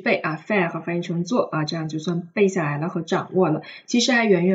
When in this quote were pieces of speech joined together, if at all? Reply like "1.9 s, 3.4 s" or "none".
none